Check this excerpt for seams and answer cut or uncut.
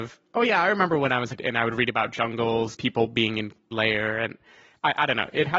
cut